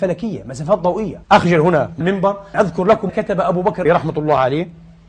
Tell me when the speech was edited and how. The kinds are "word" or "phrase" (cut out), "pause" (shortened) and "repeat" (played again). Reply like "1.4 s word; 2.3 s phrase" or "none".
1.2 s pause; 2.0 s word; 2.5 s word; 3.1 s word; 3.9 s phrase